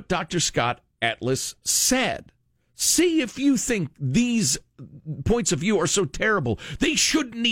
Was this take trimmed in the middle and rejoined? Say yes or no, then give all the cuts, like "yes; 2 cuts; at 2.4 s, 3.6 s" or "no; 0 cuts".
no; 0 cuts